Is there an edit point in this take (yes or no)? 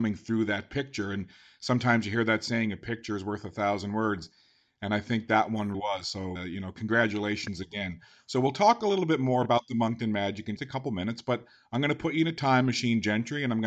yes